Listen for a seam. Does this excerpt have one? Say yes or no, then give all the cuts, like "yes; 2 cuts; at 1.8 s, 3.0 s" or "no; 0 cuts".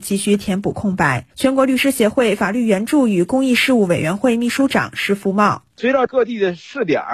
yes; 2 cuts; at 1.3 s, 5.7 s